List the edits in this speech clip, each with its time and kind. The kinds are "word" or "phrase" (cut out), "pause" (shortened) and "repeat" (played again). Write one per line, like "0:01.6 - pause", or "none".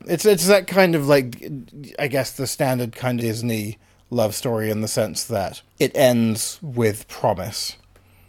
0:03.2 - word
0:05.7 - pause